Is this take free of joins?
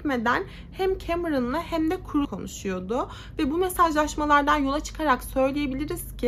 no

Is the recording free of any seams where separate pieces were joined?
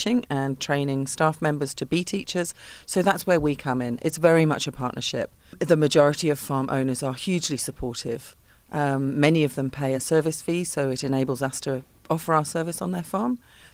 yes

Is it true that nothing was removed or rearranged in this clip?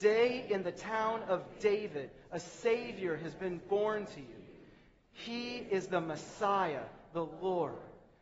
yes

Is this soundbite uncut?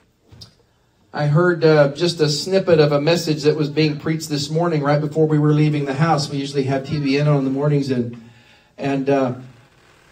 yes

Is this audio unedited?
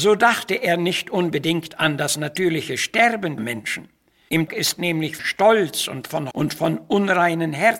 no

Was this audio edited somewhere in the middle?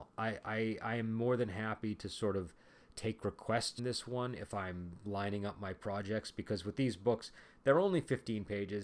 yes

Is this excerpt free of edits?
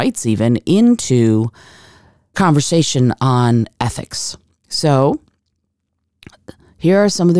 no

